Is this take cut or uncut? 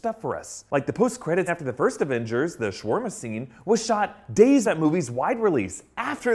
cut